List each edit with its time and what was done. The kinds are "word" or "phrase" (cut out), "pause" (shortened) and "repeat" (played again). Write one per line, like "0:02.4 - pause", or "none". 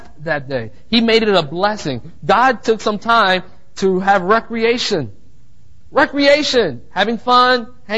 none